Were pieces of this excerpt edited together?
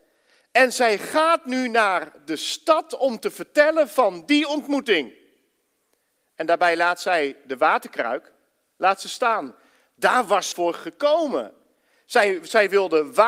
yes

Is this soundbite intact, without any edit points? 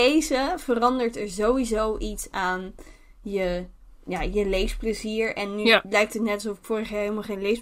yes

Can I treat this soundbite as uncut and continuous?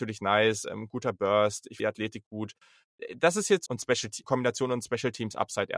no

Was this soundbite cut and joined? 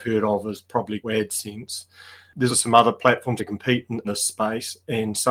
yes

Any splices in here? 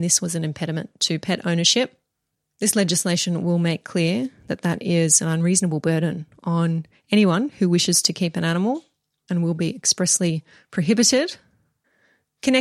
no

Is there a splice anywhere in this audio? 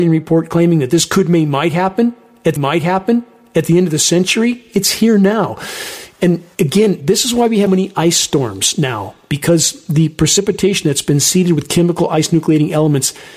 yes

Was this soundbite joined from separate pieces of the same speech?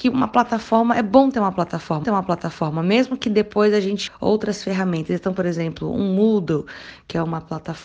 yes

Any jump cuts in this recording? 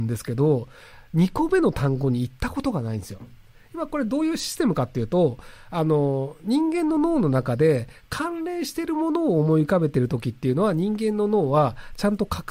no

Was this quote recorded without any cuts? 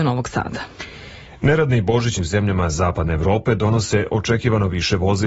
no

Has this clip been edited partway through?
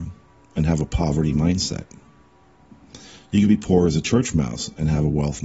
no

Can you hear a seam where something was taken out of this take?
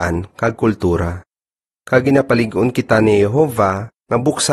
no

